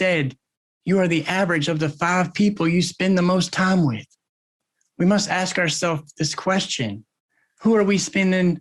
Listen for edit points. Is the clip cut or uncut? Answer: uncut